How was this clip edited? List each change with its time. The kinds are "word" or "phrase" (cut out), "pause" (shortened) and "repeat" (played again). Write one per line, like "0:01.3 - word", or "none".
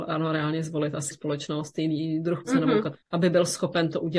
0:01.1 - word
0:02.4 - phrase
0:03.0 - pause